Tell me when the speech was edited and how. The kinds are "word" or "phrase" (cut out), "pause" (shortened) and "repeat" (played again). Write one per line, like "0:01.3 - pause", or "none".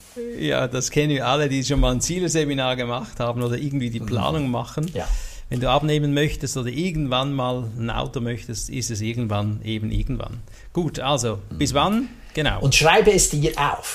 none